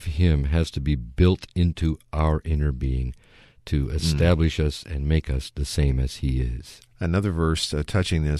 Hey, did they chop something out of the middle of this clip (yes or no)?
no